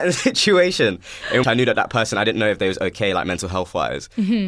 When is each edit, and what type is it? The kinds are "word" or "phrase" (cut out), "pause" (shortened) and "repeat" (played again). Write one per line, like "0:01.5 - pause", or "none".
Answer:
0:01.4 - word